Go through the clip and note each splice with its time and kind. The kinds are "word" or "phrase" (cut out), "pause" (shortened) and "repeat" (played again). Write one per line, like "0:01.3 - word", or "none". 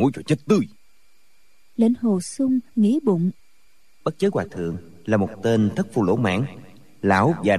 none